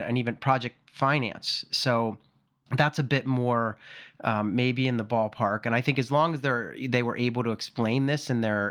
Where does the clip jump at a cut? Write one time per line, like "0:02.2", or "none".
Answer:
none